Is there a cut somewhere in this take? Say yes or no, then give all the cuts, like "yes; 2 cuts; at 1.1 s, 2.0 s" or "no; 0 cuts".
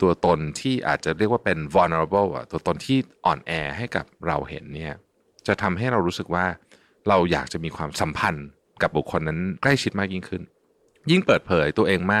no; 0 cuts